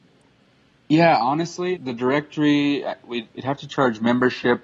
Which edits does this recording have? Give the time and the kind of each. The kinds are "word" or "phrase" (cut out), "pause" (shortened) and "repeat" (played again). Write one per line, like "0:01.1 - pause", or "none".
0:01.8 - word
0:03.3 - pause